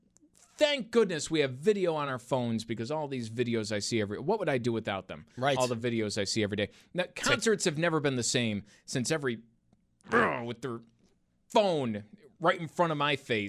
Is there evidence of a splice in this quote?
no; 0 cuts

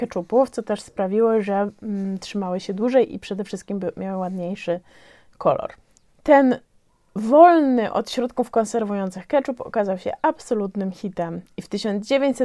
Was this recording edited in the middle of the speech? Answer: no; 0 cuts

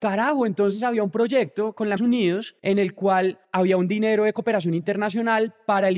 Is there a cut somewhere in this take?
yes; 3 cuts; at 2.0 s, 2.6 s, 3.4 s

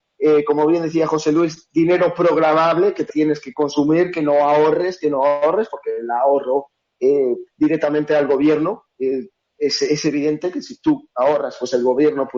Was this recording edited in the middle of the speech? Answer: yes; 2 cuts; at 3.1 s, 7.5 s

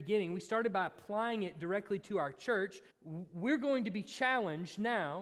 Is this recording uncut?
no; 1 cut; at 2.9 s

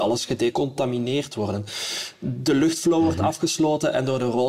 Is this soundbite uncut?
yes; 0 cuts

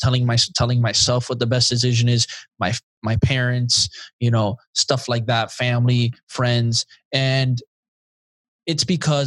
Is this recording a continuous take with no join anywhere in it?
yes; 0 cuts

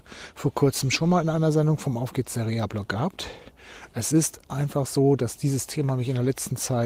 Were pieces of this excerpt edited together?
no; 0 cuts

